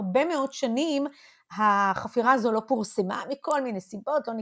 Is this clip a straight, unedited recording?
yes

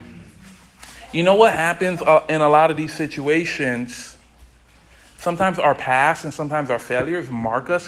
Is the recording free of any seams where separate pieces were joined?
yes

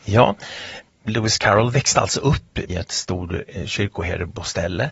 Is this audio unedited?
no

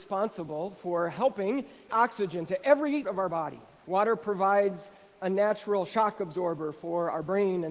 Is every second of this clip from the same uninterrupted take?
no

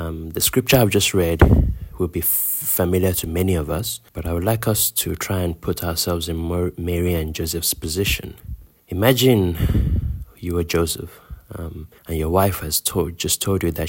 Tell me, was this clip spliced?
yes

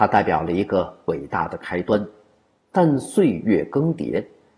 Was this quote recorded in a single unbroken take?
yes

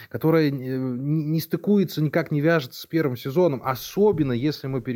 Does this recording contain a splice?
no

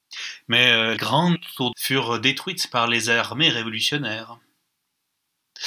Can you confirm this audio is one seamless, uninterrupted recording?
no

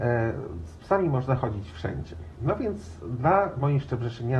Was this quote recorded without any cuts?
yes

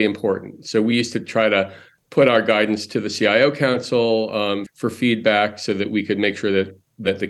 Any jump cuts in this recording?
yes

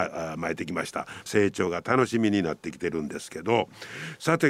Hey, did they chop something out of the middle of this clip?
yes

